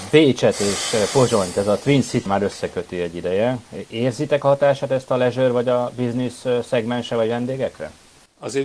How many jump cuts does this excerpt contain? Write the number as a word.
one